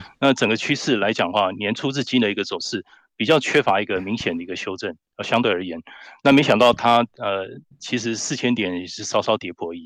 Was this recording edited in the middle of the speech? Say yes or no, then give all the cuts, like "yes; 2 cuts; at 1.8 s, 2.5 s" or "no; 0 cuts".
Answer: no; 0 cuts